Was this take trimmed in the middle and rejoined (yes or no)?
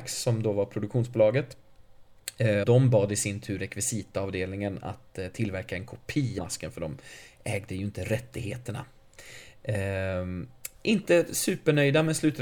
yes